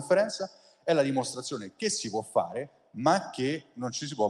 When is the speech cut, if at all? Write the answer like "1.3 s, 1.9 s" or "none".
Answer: none